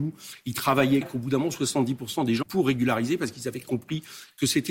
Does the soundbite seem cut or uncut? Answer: cut